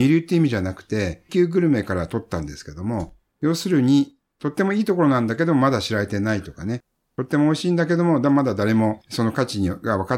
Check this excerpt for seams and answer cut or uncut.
cut